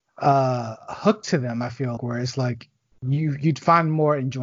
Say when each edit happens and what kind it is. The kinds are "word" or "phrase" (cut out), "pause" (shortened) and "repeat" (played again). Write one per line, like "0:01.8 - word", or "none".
0:02.0 - word
0:02.9 - pause